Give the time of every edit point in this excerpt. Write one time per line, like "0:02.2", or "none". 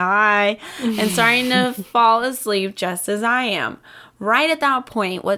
none

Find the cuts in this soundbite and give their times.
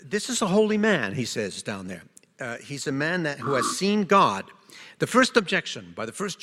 none

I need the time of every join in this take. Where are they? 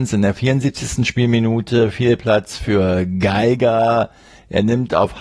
none

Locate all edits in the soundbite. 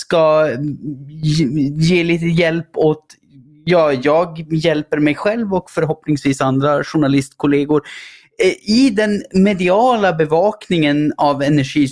none

